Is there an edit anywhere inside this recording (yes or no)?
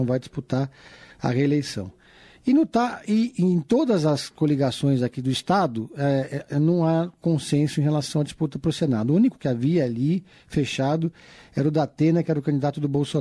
yes